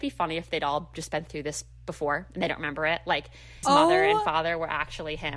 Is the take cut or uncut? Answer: cut